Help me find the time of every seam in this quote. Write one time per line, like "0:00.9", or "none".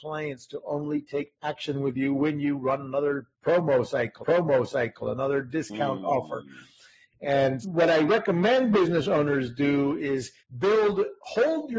0:04.2
0:07.6
0:10.4